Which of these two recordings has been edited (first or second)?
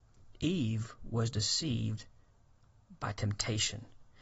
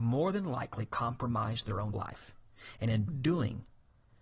second